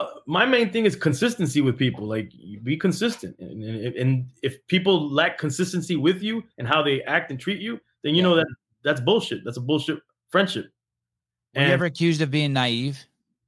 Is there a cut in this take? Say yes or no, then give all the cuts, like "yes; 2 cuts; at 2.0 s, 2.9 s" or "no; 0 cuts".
no; 0 cuts